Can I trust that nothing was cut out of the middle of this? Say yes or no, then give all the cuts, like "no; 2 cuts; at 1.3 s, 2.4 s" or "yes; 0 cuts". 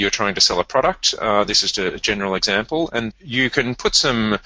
no; 2 cuts; at 1.7 s, 3.1 s